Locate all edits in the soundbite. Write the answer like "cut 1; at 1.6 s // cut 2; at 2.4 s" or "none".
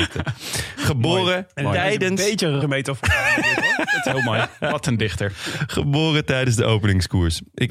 cut 1; at 2.6 s